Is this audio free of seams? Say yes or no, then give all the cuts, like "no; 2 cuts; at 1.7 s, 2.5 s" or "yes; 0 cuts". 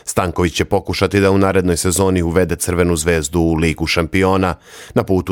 yes; 0 cuts